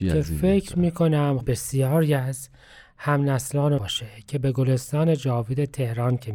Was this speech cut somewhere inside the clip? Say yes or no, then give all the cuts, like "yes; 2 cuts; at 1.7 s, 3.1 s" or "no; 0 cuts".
yes; 2 cuts; at 1.4 s, 3.8 s